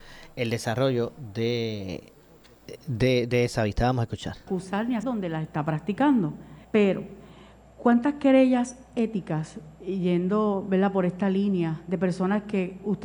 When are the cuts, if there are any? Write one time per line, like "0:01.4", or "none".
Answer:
0:05.0
0:06.6